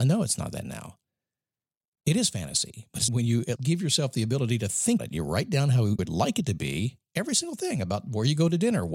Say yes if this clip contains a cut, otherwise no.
yes